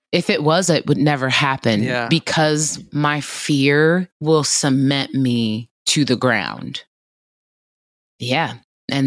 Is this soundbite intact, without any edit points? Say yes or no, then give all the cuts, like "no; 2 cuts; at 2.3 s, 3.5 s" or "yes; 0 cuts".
no; 2 cuts; at 4.1 s, 5.8 s